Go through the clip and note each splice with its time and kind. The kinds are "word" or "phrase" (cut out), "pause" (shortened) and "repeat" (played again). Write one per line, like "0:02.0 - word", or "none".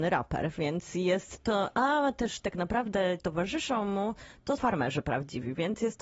0:03.2 - phrase
0:04.6 - word